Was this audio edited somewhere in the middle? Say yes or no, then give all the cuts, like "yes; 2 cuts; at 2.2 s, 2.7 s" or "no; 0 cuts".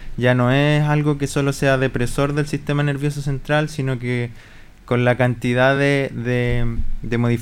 no; 0 cuts